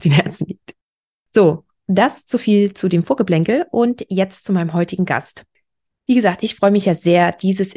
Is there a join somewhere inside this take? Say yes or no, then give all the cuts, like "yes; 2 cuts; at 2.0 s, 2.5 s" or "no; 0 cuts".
no; 0 cuts